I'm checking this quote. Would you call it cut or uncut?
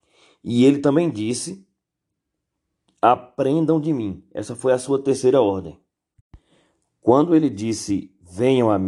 uncut